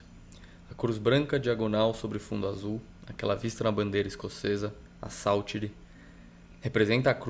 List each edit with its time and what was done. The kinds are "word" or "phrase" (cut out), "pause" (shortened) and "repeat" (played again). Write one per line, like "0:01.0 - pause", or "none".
0:04.9 - pause